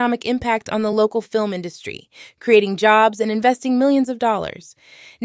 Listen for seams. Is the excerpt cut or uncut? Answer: uncut